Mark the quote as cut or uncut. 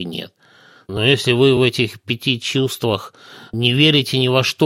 uncut